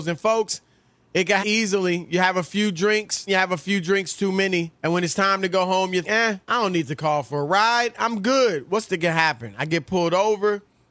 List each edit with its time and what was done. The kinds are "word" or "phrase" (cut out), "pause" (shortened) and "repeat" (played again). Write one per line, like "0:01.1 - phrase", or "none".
0:01.4 - word
0:03.3 - word
0:04.7 - pause
0:06.0 - word
0:06.4 - pause
0:08.9 - phrase